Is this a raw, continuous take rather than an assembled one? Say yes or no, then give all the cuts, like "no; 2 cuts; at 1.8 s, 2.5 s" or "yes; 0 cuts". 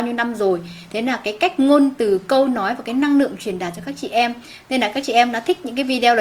yes; 0 cuts